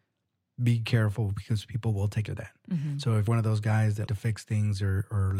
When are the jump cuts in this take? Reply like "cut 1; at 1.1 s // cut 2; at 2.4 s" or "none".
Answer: cut 1; at 2.3 s // cut 2; at 3.3 s // cut 3; at 4.1 s